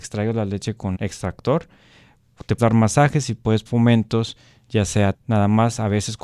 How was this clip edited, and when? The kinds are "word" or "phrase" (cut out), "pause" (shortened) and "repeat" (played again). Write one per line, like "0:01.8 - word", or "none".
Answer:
0:00.9 - word
0:02.6 - word
0:03.7 - word
0:05.1 - word